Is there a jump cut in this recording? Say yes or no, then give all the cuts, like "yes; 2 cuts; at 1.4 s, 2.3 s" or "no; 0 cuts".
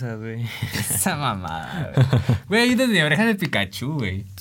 no; 0 cuts